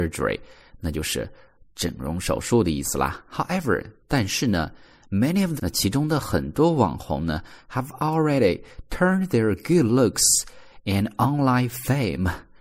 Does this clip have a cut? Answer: yes; 1 cut; at 5.6 s

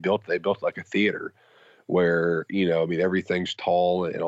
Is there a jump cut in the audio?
no; 0 cuts

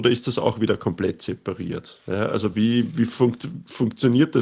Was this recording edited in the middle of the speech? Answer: no; 0 cuts

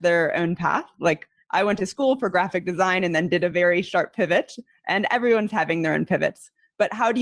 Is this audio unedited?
yes; 0 cuts

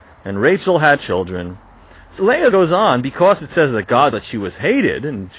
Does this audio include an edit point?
yes; 4 cuts; at 1.0 s, 2.2 s, 2.5 s, 4.1 s

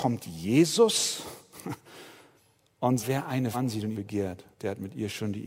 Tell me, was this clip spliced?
yes; 4 cuts; at 3.0 s, 3.5 s, 3.9 s, 4.5 s

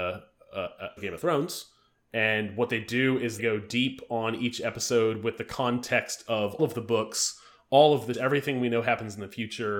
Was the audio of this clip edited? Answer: yes; 4 cuts; at 1.0 s, 3.4 s, 6.6 s, 8.1 s

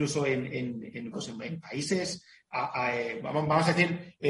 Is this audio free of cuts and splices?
no; 1 cut; at 1.1 s

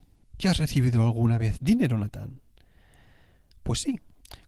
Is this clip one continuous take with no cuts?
yes; 0 cuts

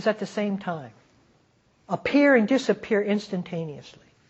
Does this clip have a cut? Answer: yes; 1 cut; at 1.4 s

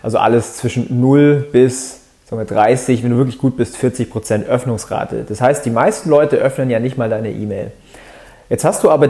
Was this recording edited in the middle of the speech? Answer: no; 0 cuts

